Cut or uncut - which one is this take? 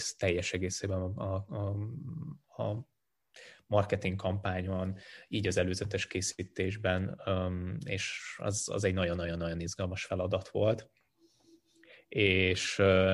uncut